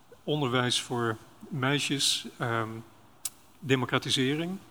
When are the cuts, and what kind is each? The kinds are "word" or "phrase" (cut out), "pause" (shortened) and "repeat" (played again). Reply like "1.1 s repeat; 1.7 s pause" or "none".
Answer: none